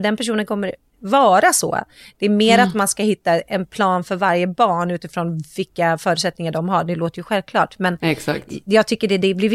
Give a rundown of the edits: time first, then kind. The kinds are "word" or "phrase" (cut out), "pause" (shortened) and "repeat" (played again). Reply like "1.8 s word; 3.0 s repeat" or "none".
none